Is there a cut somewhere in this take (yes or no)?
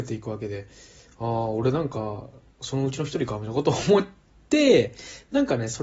no